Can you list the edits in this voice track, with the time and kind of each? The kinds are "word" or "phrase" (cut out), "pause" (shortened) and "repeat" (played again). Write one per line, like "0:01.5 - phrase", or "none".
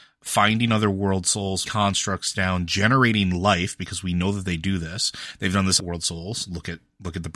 0:01.7 - word
0:05.8 - phrase